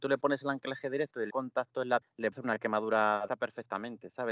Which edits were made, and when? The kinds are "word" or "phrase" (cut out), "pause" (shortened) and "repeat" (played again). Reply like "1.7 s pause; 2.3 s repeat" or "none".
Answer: 1.3 s word; 2.0 s word; 2.3 s word; 3.3 s word